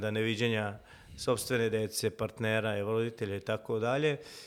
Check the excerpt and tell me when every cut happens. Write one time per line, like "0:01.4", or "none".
none

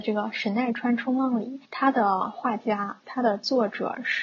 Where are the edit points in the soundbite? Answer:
0:01.7

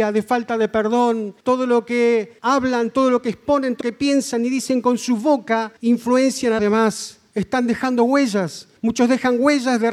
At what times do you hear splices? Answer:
0:01.4
0:02.4
0:03.8
0:05.8
0:06.6
0:08.8

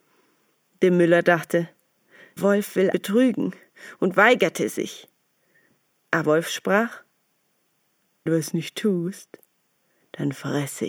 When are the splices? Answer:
0:02.4
0:02.9
0:06.2
0:08.3

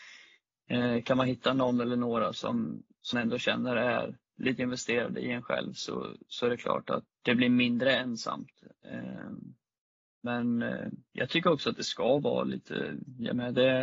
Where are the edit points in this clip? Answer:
0:03.1
0:04.6
0:07.1

